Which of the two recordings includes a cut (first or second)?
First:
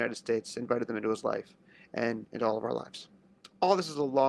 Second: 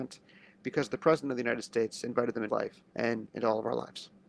second